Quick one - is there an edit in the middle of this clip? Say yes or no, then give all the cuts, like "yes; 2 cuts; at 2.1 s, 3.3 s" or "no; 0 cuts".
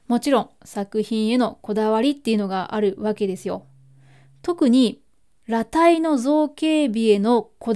no; 0 cuts